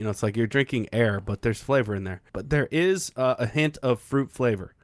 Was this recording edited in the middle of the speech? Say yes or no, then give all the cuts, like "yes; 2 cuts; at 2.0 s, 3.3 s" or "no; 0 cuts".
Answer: yes; 1 cut; at 2.3 s